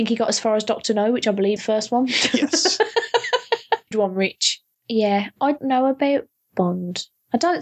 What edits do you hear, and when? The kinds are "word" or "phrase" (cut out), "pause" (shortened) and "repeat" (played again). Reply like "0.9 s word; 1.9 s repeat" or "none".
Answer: 1.6 s word; 3.9 s word; 5.6 s word